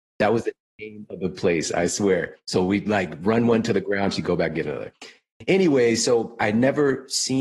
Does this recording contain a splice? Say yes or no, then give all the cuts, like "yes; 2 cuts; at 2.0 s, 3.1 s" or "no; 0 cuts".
no; 0 cuts